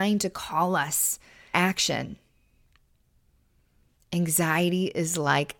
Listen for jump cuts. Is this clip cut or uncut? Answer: cut